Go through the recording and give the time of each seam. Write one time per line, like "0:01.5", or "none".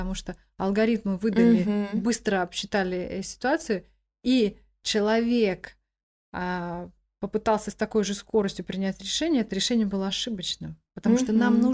none